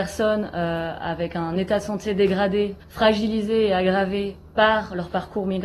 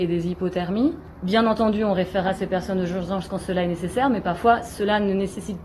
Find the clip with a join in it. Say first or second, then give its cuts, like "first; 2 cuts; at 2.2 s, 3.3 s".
first; 1 cut; at 2.8 s